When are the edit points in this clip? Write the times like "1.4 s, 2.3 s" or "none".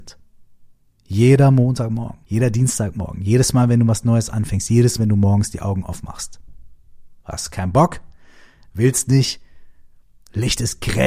2.2 s, 5.0 s, 7.2 s